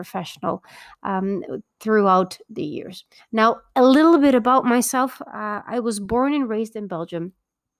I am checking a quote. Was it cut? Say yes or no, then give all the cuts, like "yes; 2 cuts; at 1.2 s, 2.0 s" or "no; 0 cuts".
yes; 1 cut; at 3.2 s